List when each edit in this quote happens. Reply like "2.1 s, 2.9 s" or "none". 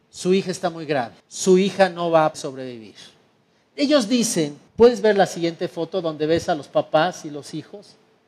1.2 s, 2.3 s, 4.7 s